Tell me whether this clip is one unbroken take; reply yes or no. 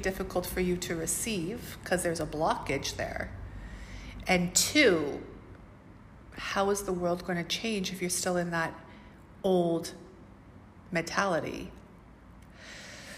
yes